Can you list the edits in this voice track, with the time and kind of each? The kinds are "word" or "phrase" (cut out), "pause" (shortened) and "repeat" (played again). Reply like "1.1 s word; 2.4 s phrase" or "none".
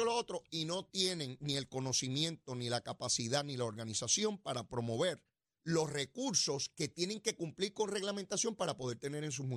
5.4 s pause